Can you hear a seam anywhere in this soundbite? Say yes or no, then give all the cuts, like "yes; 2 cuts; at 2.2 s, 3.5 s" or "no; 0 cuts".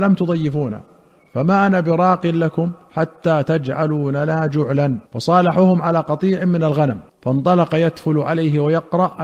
yes; 3 cuts; at 2.8 s, 5.1 s, 7.1 s